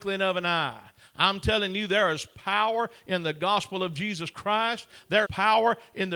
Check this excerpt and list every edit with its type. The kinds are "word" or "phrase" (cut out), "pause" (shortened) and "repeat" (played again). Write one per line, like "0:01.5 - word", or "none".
0:05.2 - word